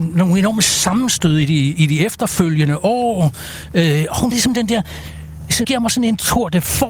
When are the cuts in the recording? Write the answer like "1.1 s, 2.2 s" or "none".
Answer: 4.3 s, 5.6 s